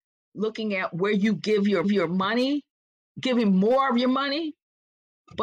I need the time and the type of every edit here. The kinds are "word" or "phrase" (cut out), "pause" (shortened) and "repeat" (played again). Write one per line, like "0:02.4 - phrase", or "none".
0:01.8 - repeat